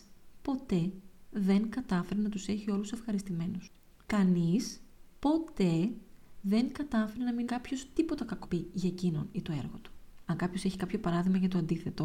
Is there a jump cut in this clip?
yes; 2 cuts; at 7.5 s, 8.4 s

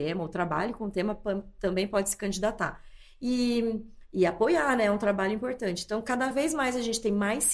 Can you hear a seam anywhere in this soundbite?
no; 0 cuts

